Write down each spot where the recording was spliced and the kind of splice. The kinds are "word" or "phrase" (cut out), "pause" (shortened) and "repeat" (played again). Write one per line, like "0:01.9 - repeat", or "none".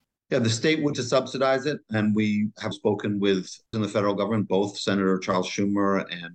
0:00.9 - word
0:02.7 - word
0:03.7 - word